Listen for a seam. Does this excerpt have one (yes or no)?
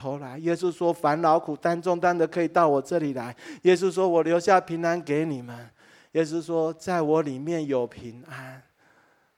no